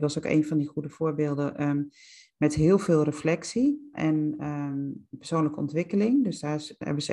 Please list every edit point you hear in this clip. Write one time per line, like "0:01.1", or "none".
0:03.9